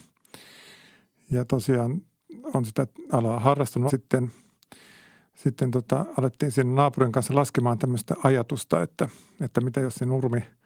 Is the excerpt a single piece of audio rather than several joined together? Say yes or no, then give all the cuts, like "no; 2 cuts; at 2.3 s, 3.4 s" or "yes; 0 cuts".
no; 1 cut; at 3.9 s